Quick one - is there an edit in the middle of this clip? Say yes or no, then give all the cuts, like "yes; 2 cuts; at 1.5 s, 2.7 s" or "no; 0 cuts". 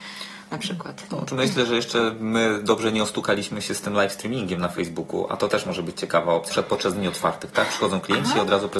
yes; 1 cut; at 6.5 s